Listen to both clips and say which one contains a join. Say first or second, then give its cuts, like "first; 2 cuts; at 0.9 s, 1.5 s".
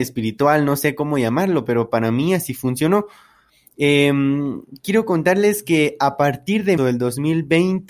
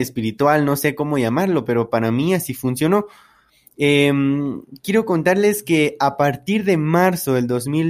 first; 1 cut; at 6.8 s